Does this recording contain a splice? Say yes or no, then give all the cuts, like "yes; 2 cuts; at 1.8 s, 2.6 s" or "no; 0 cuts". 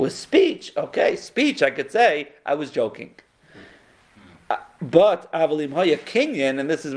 no; 0 cuts